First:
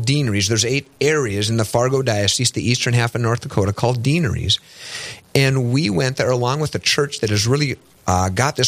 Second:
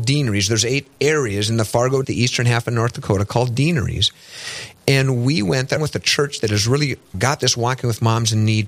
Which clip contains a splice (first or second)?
second